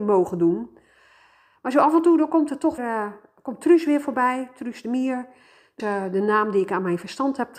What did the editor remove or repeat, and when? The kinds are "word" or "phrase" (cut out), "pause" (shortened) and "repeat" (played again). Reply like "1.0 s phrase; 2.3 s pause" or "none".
2.8 s word; 5.8 s word